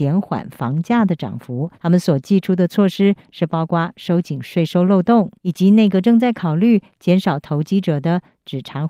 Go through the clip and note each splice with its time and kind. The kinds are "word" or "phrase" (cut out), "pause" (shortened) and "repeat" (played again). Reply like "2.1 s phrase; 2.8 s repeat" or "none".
1.7 s pause; 5.4 s pause